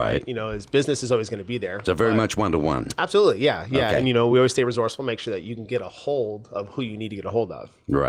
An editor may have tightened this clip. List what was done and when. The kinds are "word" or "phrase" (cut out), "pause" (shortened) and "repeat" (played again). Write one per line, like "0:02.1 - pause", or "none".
none